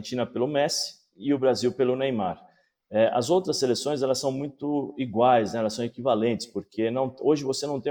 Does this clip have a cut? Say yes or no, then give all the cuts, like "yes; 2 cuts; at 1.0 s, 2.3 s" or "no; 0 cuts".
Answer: no; 0 cuts